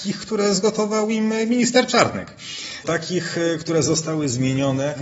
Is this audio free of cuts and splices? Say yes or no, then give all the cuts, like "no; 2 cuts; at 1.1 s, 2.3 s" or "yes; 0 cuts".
yes; 0 cuts